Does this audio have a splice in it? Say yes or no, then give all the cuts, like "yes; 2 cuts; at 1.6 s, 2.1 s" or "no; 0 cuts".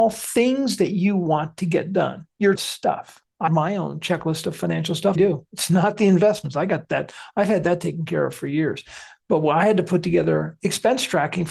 yes; 3 cuts; at 2.6 s, 3.5 s, 5.2 s